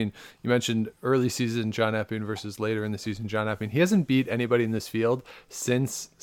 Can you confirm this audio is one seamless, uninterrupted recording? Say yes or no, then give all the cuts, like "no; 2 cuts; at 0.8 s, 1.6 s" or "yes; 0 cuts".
yes; 0 cuts